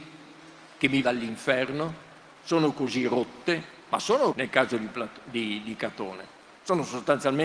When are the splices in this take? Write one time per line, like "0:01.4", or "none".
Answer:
0:01.0
0:04.3

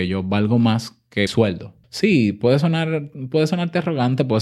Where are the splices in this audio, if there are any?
0:01.3
0:01.8

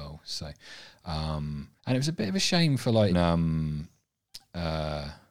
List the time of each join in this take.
0:01.8
0:03.1

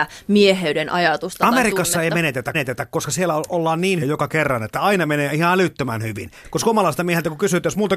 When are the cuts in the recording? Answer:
0:02.5
0:04.0

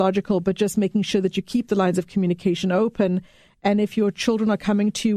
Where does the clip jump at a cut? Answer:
none

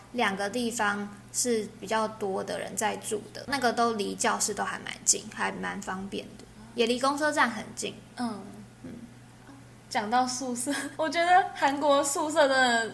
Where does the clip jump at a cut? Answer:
0:03.4
0:10.9

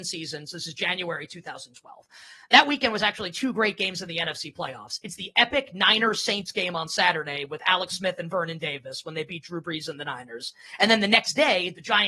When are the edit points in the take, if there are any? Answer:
none

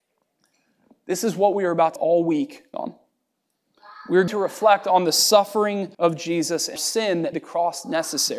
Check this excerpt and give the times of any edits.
0:02.0
0:02.7
0:04.3
0:05.9
0:06.8
0:07.3

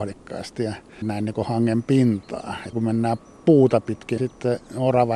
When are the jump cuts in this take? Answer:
0:01.0
0:02.7
0:04.2

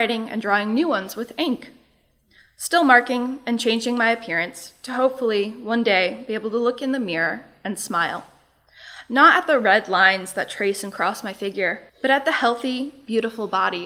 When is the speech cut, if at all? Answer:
0:11.9

